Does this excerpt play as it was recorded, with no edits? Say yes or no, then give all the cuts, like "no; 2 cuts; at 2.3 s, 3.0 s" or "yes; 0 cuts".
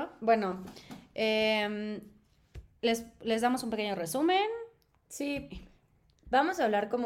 yes; 0 cuts